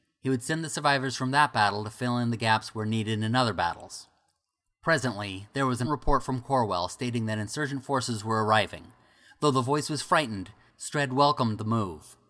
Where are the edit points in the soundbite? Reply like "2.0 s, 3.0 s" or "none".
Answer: 5.8 s